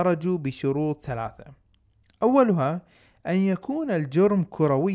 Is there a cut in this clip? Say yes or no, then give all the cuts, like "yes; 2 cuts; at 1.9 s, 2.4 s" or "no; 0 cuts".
no; 0 cuts